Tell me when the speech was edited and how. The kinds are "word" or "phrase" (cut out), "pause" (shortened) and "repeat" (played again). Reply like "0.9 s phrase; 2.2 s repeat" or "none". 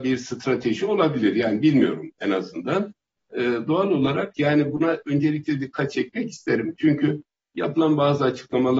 none